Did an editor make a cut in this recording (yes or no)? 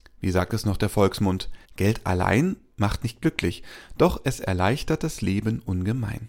yes